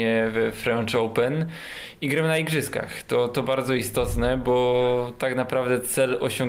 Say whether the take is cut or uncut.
uncut